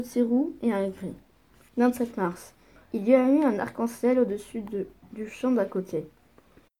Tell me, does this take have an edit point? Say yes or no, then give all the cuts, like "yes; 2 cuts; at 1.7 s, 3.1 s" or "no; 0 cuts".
no; 0 cuts